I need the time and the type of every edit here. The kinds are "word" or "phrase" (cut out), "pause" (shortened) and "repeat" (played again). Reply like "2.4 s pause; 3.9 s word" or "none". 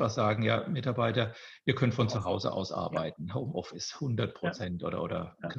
none

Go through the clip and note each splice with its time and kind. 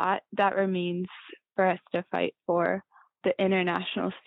none

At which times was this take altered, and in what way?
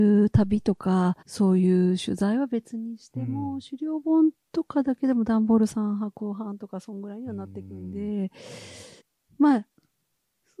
1.2 s pause; 9.0 s pause

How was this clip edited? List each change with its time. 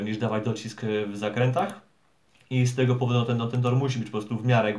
none

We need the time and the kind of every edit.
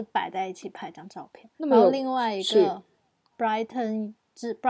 1.5 s pause; 3.3 s phrase

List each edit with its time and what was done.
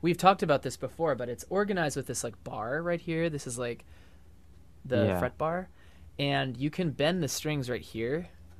none

